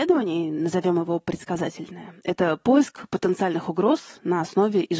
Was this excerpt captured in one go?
yes; 0 cuts

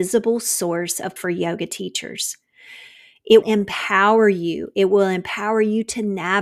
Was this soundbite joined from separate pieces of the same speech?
yes; 2 cuts; at 1.2 s, 3.4 s

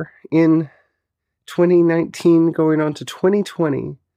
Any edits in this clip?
yes; 1 cut; at 1.2 s

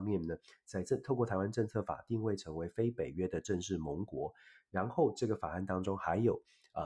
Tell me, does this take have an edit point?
no; 0 cuts

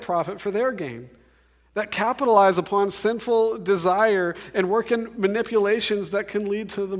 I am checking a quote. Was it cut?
no; 0 cuts

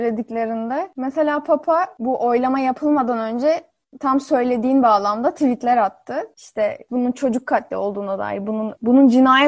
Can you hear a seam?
no; 0 cuts

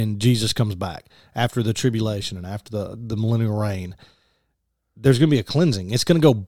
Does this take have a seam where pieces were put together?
no; 0 cuts

